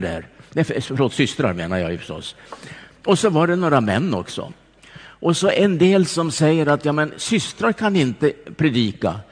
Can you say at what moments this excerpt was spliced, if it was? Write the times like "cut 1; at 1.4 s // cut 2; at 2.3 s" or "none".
none